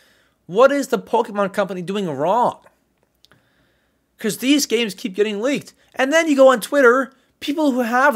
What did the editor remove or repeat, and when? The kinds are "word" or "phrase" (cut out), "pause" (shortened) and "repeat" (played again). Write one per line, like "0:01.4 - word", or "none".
none